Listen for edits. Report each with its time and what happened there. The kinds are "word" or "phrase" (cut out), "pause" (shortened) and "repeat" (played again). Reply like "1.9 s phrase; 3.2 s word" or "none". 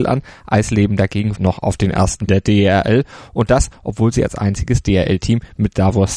1.3 s word; 2.3 s phrase